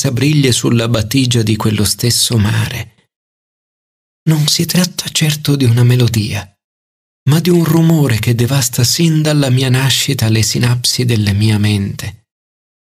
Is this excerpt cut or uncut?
uncut